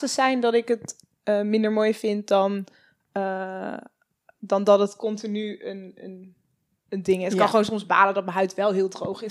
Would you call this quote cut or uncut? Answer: uncut